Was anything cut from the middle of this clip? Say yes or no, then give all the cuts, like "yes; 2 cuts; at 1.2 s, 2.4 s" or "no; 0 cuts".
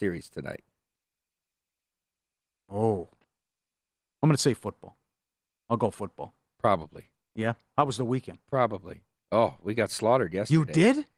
no; 0 cuts